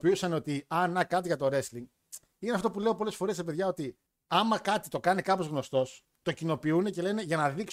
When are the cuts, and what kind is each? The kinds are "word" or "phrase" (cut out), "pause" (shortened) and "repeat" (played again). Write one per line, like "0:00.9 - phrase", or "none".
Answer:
0:04.1 - pause
0:06.1 - pause